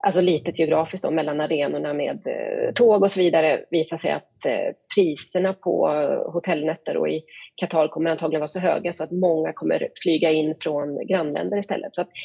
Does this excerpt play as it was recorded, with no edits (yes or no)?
yes